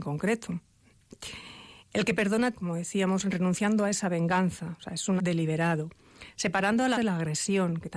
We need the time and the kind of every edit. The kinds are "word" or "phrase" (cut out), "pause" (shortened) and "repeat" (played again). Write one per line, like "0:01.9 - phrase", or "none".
0:01.8 - pause
0:02.5 - phrase
0:05.2 - word
0:06.9 - word